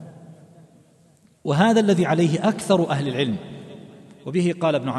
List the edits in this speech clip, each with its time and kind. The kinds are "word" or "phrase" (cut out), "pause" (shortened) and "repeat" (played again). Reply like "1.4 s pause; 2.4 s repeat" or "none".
none